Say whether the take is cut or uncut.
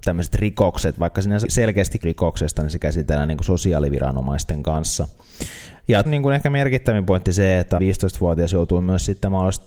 cut